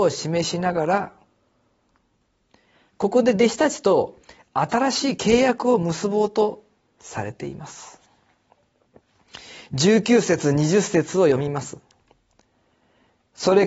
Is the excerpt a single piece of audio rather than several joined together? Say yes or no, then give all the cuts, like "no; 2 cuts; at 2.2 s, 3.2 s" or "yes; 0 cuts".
yes; 0 cuts